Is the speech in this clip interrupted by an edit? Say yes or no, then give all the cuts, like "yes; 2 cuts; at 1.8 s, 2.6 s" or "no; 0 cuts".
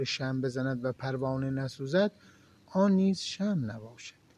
no; 0 cuts